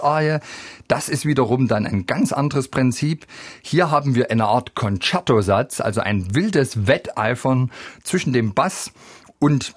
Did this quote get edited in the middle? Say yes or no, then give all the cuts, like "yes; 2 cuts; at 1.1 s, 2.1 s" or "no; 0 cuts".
no; 0 cuts